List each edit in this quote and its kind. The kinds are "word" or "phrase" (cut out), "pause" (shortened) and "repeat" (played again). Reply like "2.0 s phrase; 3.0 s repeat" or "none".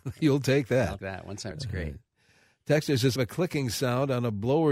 1.0 s word; 1.5 s word; 3.2 s word